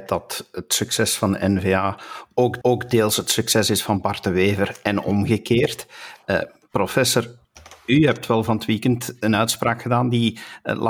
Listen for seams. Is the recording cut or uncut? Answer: cut